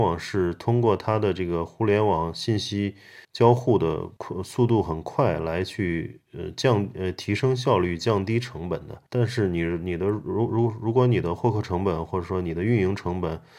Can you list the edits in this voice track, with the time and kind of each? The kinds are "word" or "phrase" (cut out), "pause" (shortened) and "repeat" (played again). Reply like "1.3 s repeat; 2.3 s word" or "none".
3.2 s pause; 4.2 s pause; 9.1 s pause

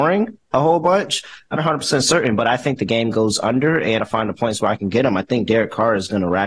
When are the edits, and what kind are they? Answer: 1.6 s word; 4.0 s phrase

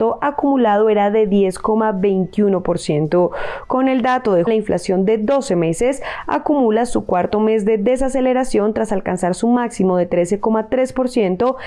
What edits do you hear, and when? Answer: 4.5 s word

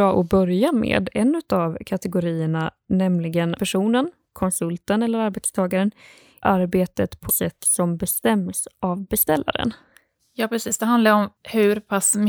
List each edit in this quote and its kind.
3.6 s word; 6.4 s word; 7.3 s word

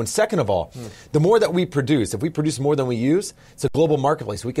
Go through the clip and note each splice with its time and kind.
none

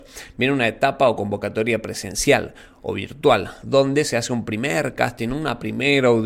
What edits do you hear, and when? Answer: none

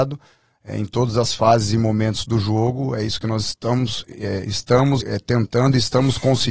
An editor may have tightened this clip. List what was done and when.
5.0 s word

